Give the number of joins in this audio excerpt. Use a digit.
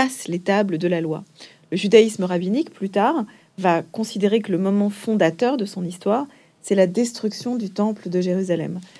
0